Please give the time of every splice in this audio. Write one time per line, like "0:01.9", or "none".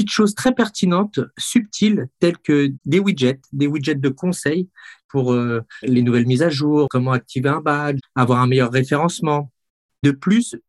none